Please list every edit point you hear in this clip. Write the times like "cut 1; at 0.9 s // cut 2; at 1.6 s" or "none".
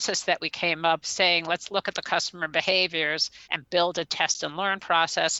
cut 1; at 1.0 s // cut 2; at 3.4 s // cut 3; at 4.1 s